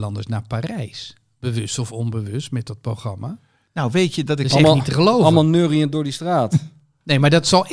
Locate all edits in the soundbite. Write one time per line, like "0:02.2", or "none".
none